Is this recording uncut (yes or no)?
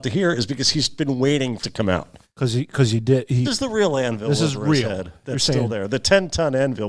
no